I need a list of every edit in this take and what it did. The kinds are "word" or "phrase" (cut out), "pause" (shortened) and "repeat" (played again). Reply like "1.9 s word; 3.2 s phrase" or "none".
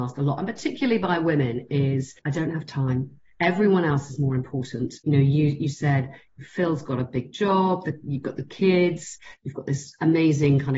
2.2 s pause; 5.0 s pause